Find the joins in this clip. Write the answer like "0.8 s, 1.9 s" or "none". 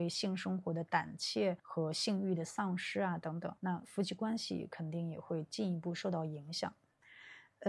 1.6 s, 3.6 s